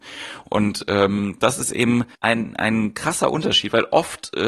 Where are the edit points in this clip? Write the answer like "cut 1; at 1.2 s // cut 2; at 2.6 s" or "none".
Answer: cut 1; at 2.1 s